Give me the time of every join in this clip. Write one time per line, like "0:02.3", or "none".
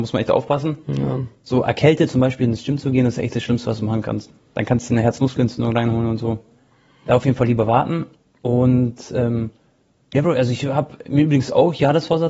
none

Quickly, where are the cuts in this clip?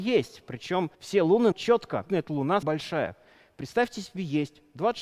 0:00.9
0:01.5
0:02.1
0:02.6

